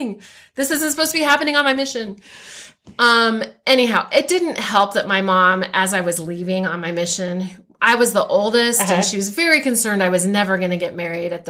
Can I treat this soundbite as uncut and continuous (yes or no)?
yes